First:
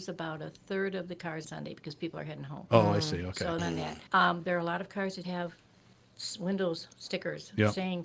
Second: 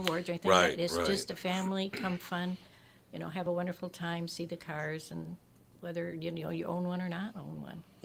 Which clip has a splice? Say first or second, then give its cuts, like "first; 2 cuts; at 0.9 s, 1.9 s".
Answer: first; 4 cuts; at 1.4 s, 3.6 s, 4.1 s, 5.2 s